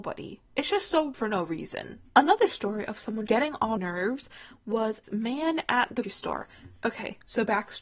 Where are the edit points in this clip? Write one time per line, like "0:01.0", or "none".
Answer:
0:01.1
0:03.3
0:03.8
0:05.0
0:06.0